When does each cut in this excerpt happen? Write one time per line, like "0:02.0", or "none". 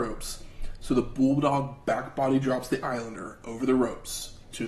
none